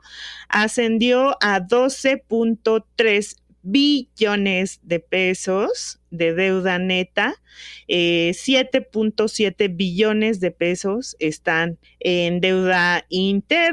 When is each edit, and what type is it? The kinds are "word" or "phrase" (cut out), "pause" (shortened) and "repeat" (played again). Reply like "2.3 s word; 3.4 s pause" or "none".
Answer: 11.8 s pause